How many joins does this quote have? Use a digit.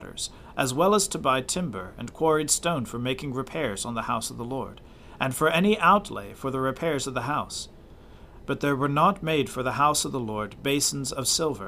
0